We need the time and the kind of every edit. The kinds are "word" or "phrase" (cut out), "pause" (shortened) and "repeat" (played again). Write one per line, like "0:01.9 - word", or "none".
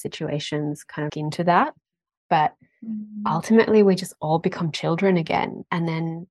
0:01.1 - phrase